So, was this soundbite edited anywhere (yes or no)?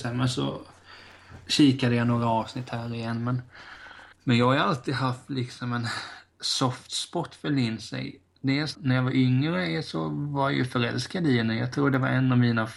yes